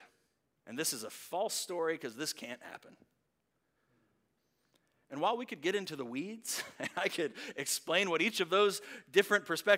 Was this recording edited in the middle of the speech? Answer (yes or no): no